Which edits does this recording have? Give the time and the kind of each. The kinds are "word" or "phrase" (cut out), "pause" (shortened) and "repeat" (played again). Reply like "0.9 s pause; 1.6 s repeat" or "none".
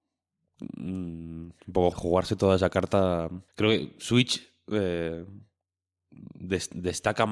1.9 s word; 3.5 s pause